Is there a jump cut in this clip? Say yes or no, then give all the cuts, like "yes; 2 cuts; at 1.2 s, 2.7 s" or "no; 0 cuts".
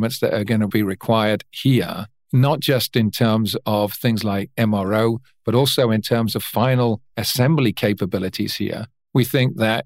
no; 0 cuts